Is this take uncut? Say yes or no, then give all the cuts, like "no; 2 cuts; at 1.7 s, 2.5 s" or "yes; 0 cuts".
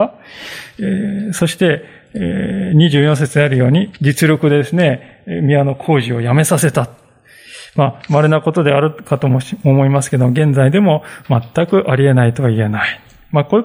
no; 1 cut; at 4.0 s